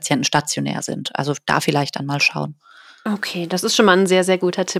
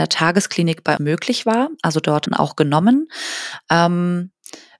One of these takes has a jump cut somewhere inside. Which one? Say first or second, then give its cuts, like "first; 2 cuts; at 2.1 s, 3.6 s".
second; 2 cuts; at 1.0 s, 2.3 s